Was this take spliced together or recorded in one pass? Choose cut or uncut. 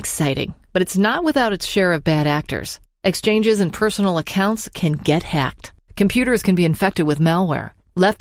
uncut